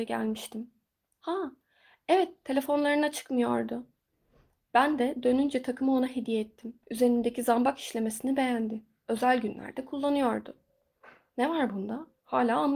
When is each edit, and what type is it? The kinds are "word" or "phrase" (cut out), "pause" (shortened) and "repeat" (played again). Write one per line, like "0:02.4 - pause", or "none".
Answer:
0:06.8 - pause